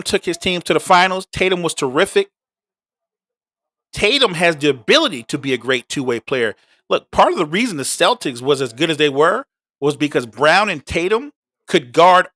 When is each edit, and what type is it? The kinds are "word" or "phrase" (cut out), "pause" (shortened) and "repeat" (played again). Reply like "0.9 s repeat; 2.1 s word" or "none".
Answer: none